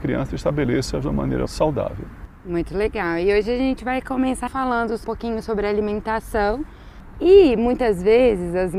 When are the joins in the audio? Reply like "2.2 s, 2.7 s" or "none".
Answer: 1.0 s, 1.5 s, 4.5 s, 5.0 s